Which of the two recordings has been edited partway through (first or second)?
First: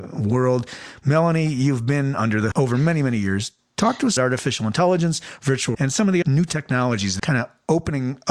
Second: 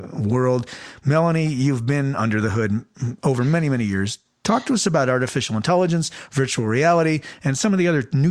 first